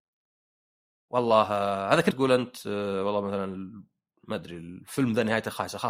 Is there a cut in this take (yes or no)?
yes